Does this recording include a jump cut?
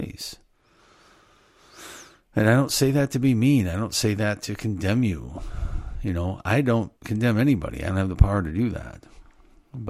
yes; 1 cut; at 7.0 s

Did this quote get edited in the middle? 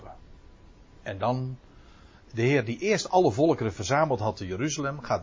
no; 0 cuts

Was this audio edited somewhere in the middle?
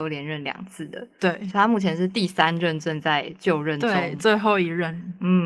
no; 0 cuts

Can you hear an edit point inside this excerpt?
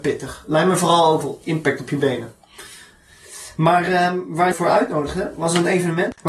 yes; 2 cuts; at 1.2 s, 4.5 s

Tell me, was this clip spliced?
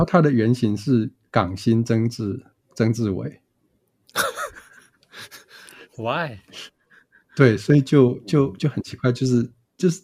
no; 0 cuts

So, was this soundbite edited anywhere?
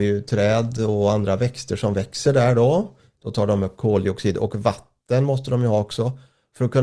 no; 0 cuts

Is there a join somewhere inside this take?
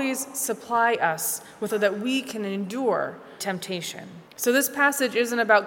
yes; 3 cuts; at 1.7 s, 3.4 s, 4.3 s

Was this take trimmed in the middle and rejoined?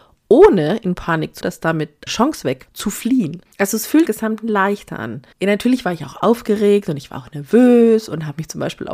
yes; 6 cuts; at 1.4 s, 2.1 s, 2.7 s, 3.5 s, 4.1 s, 5.3 s

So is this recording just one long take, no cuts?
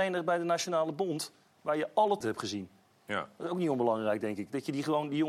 no; 1 cut; at 2.2 s

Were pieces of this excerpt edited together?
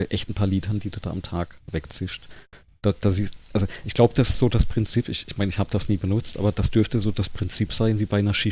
no; 0 cuts

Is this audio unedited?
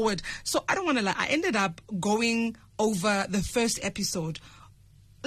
yes; 0 cuts

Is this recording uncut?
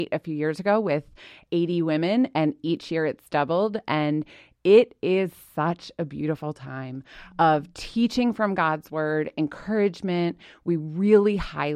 yes; 0 cuts

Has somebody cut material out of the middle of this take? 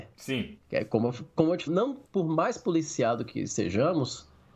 yes; 2 cuts; at 1.7 s, 2.0 s

